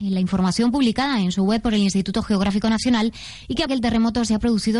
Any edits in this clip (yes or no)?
yes